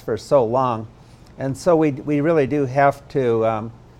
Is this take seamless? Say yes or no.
yes